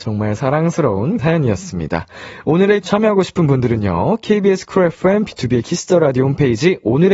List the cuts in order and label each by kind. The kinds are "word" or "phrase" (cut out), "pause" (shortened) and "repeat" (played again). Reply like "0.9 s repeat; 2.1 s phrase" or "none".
1.2 s word; 2.8 s word